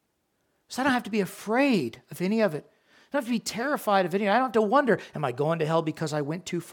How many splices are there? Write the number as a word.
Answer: zero